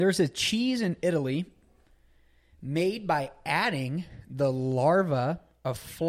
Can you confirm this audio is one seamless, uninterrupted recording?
yes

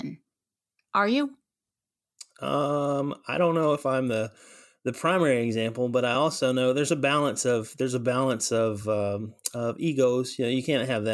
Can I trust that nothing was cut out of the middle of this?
yes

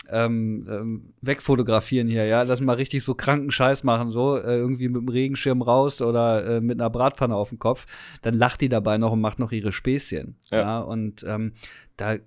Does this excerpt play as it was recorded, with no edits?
yes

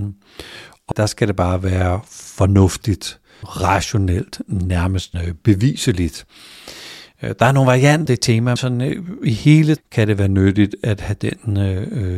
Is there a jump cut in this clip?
yes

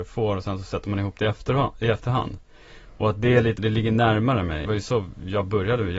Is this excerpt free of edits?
no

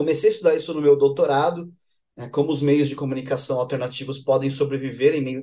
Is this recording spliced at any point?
no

